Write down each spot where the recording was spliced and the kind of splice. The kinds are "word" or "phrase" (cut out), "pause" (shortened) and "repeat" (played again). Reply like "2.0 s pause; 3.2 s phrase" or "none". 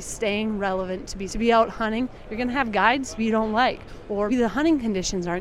1.3 s phrase; 3.2 s word; 4.3 s word

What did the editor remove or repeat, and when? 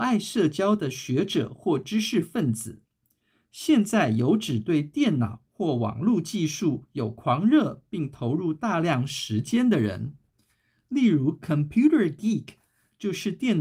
none

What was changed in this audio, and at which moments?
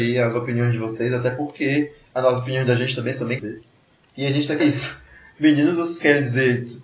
3.4 s word; 4.1 s pause; 4.6 s word

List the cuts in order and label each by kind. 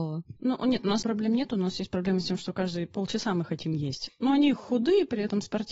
1.0 s word

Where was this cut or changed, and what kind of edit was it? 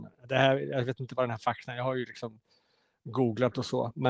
none

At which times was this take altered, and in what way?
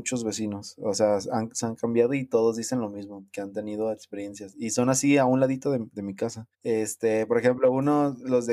1.6 s phrase; 6.5 s pause

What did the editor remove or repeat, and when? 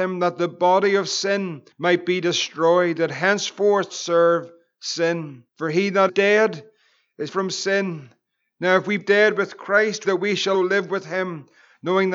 1.7 s pause; 3.9 s phrase; 5.5 s pause; 6.1 s word; 7.3 s word; 9.0 s word; 10.0 s phrase; 10.5 s word

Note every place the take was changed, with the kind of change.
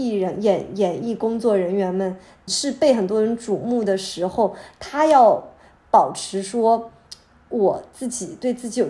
2.5 s word

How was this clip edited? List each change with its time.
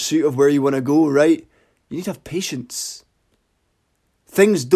none

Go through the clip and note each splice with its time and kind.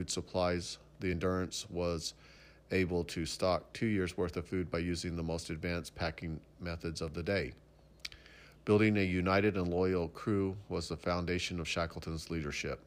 none

